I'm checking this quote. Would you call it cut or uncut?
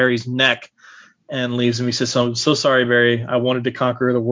uncut